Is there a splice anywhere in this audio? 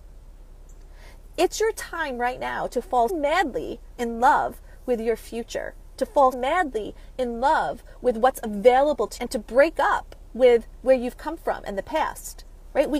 yes; 3 cuts; at 3.1 s, 6.3 s, 9.2 s

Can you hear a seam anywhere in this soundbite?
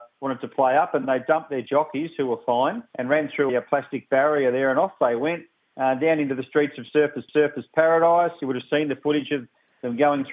yes; 3 cuts; at 2.9 s, 3.5 s, 7.3 s

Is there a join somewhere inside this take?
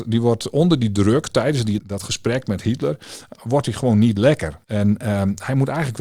yes; 2 cuts; at 1.8 s, 4.6 s

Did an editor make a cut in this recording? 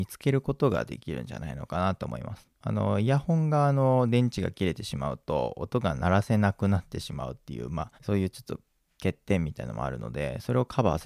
yes; 2 cuts; at 2.5 s, 8.0 s

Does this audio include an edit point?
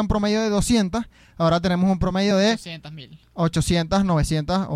no; 0 cuts

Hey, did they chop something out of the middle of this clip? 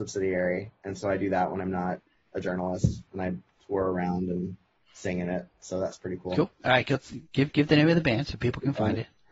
no; 0 cuts

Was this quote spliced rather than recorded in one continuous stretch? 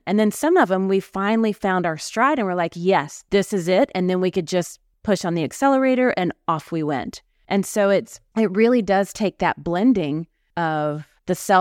no; 0 cuts

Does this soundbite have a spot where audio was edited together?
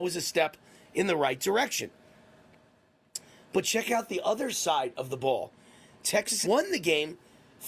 yes; 1 cut; at 6.4 s

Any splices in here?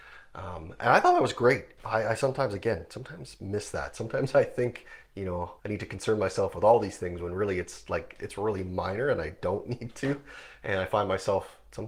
yes; 1 cut; at 5.6 s

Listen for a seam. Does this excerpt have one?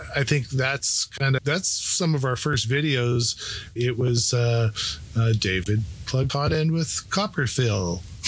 yes; 3 cuts; at 1.4 s, 3.8 s, 6.3 s

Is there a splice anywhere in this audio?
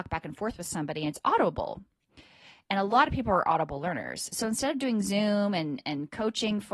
no; 0 cuts

